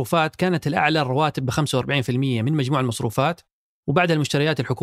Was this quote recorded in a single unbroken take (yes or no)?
yes